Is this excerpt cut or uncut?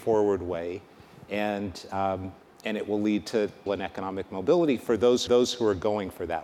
cut